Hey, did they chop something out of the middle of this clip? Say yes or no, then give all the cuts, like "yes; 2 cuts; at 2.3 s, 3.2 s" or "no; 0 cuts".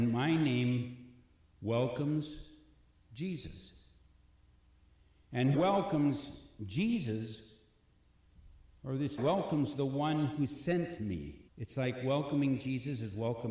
yes; 4 cuts; at 2.9 s, 5.5 s, 9.2 s, 11.5 s